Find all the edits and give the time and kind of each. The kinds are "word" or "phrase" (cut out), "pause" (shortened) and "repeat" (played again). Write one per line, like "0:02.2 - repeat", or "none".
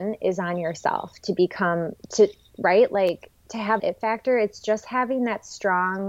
0:03.8 - word

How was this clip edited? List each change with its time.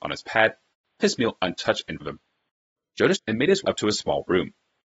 0:01.0 - word
0:02.0 - word
0:03.1 - word
0:03.6 - word

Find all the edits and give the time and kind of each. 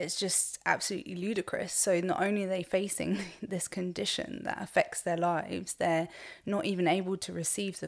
none

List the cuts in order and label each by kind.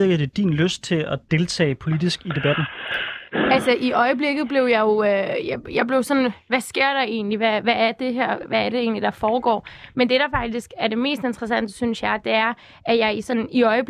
none

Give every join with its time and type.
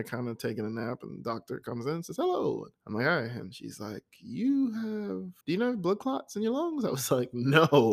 0:02.8 - pause
0:05.4 - pause

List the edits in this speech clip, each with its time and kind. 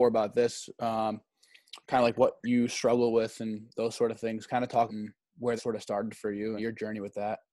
0:01.8 - pause
0:04.9 - phrase
0:05.6 - word
0:06.6 - phrase

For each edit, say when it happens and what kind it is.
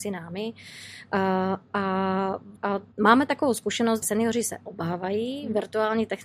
0:02.6 - word
0:02.9 - pause
0:04.0 - word

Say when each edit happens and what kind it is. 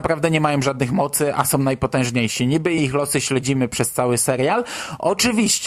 0:02.8 - word

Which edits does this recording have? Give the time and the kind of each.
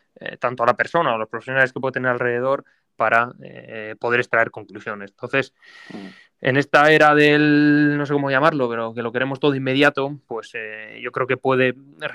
none

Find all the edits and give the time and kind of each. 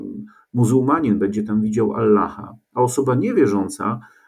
0:02.6 - pause

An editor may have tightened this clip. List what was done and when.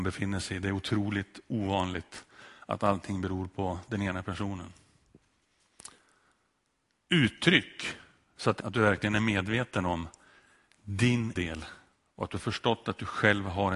0:08.6 - word
0:11.4 - word

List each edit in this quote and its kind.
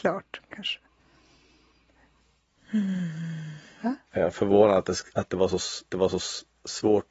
0:05.9 - repeat

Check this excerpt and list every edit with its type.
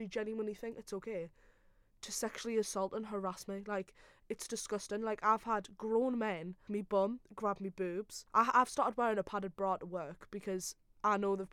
0:06.7 - word
0:07.2 - pause
0:08.3 - pause

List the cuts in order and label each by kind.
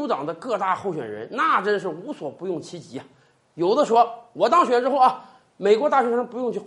none

